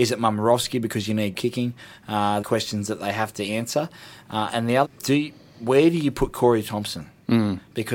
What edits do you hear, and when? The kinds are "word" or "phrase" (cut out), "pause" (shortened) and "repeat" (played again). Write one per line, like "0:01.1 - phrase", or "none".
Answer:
0:01.3 - word
0:02.4 - phrase
0:04.8 - phrase

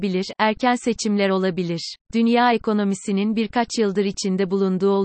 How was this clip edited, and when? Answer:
0:02.0 - pause

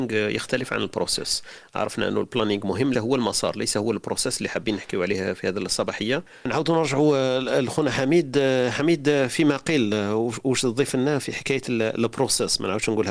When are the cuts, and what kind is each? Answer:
0:02.9 - phrase

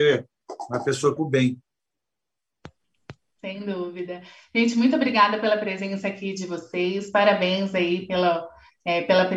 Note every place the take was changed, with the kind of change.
0:01.2 - phrase

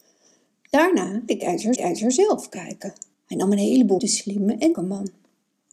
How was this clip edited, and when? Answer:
0:01.3 - word
0:01.8 - repeat
0:03.1 - pause
0:04.0 - phrase
0:04.7 - word

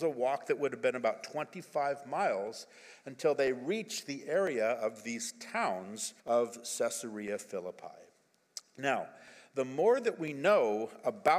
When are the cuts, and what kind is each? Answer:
0:06.2 - pause

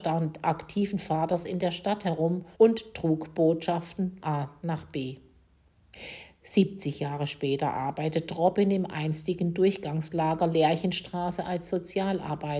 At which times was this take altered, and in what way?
0:02.5 - pause
0:04.2 - word

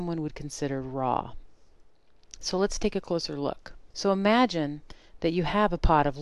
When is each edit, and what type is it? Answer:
0:03.9 - pause

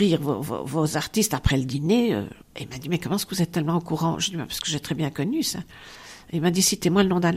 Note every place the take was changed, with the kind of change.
0:02.4 - pause

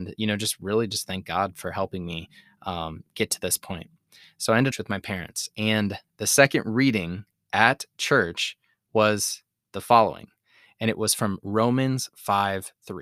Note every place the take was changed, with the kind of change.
0:04.7 - phrase

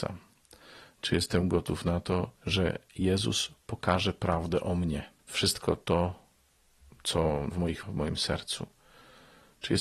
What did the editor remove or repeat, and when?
0:02.4 - pause
0:05.2 - pause
0:07.5 - word
0:07.8 - word

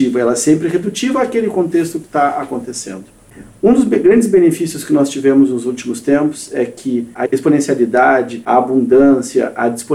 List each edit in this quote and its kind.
none

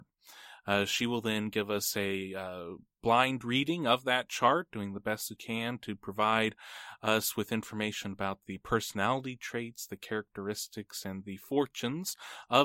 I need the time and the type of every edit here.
0:05.4 - word

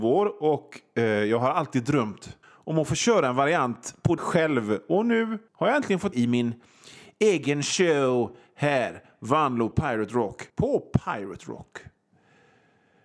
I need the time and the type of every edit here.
0:02.4 - pause
0:04.2 - word
0:05.5 - pause
0:06.1 - phrase
0:09.7 - word
0:10.5 - pause

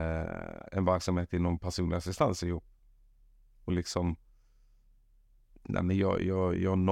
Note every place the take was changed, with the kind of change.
0:03.7 - word

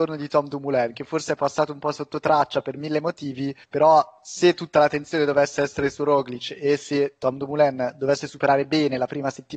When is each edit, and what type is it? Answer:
0:03.6 - pause

